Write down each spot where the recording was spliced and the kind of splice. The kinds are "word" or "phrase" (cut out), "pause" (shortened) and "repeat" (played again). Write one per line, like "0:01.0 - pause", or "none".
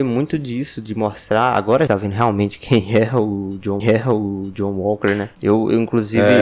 0:01.9 - word
0:03.8 - repeat